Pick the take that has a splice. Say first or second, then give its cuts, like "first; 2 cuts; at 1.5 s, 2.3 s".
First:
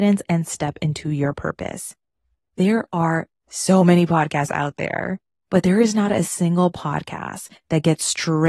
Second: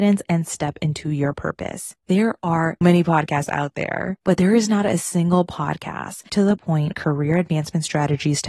second; 5 cuts; at 2.0 s, 2.8 s, 4.2 s, 6.3 s, 6.9 s